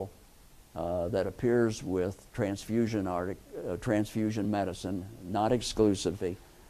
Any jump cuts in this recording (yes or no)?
no